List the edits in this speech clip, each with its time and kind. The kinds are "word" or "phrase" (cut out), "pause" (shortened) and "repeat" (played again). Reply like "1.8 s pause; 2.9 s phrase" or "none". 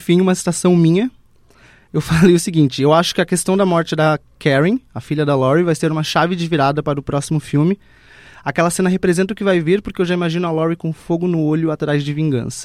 none